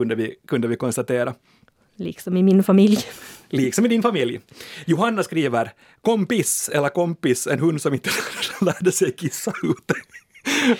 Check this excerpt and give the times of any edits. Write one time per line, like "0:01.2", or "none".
none

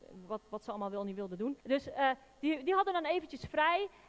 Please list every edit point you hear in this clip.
0:01.6

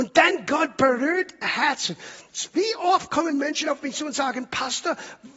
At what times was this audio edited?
0:01.4

